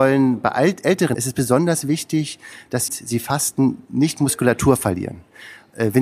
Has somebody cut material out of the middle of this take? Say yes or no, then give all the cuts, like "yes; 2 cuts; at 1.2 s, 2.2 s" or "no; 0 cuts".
yes; 2 cuts; at 1.1 s, 2.9 s